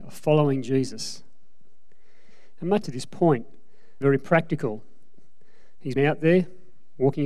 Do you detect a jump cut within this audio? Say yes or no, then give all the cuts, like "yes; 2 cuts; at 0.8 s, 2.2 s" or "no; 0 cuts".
yes; 3 cuts; at 2.8 s, 4.0 s, 6.0 s